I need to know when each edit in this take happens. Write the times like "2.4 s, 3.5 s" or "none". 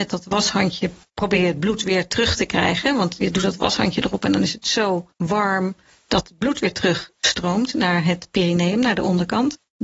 none